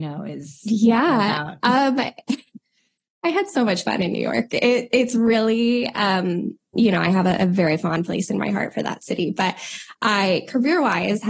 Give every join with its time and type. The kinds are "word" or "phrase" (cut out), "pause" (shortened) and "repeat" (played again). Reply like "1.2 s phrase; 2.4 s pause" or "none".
none